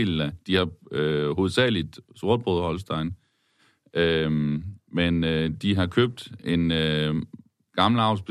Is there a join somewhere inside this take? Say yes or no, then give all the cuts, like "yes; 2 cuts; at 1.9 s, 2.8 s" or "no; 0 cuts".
no; 0 cuts